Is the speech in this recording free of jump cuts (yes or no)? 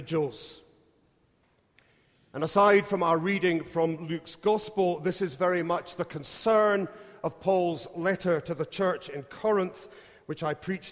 yes